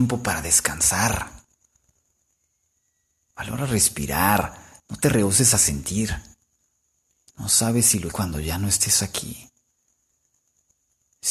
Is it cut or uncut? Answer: cut